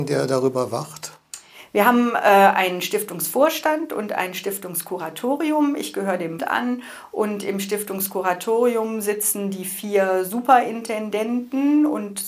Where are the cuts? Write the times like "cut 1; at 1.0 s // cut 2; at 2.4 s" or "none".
cut 1; at 6.4 s